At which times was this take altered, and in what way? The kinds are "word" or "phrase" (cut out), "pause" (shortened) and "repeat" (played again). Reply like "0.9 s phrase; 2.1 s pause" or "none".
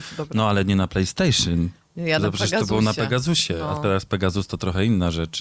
none

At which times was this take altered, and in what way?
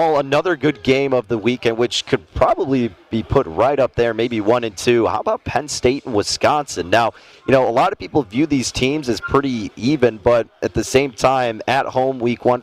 none

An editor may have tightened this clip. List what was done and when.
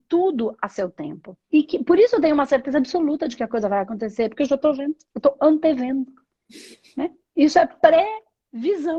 1.4 s pause; 5.0 s pause

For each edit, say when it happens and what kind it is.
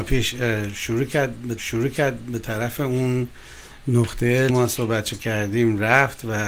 1.6 s repeat; 4.5 s phrase

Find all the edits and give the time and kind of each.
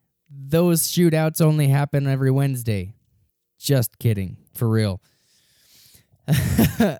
3.3 s pause; 4.5 s pause

